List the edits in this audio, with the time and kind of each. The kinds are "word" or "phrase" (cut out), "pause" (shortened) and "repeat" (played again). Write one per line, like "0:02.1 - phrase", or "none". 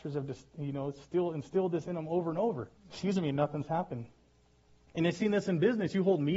0:02.8 - pause